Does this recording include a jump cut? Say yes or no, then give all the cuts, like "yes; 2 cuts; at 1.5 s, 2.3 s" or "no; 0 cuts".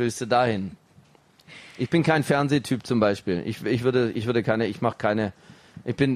no; 0 cuts